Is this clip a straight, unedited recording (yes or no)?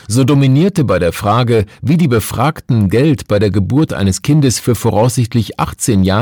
yes